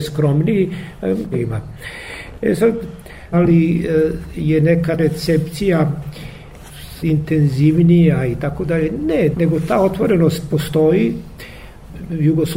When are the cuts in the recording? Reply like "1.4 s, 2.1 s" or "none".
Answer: 1.3 s, 3.3 s, 5.0 s, 7.0 s, 9.3 s